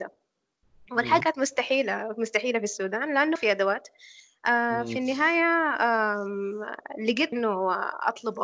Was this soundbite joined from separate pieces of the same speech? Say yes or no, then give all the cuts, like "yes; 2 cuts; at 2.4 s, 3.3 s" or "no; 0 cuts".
yes; 3 cuts; at 1.2 s, 3.4 s, 7.3 s